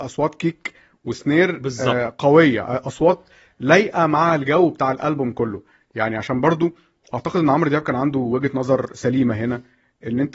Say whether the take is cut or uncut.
uncut